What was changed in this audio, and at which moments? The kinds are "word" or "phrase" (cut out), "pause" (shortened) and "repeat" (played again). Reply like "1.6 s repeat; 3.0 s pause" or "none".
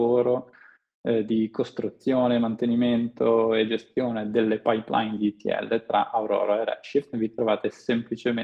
none